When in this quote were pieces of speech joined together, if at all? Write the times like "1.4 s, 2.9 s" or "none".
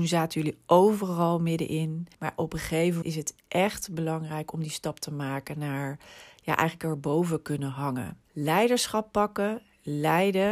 2.1 s, 3.0 s, 8.2 s

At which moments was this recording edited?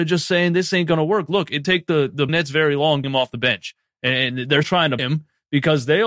1.6 s, 2.3 s, 3.0 s, 4.6 s, 5.0 s

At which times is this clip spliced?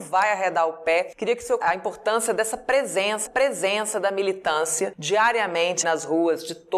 1.6 s, 3.3 s, 5.8 s

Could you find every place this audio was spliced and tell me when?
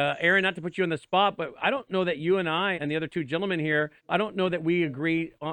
2.7 s, 4.0 s

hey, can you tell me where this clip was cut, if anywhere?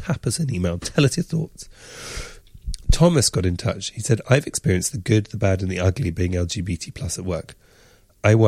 none

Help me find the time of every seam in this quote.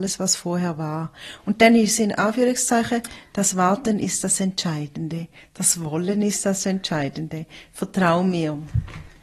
none

